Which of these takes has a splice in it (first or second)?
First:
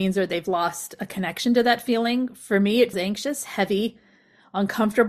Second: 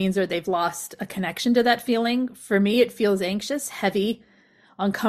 first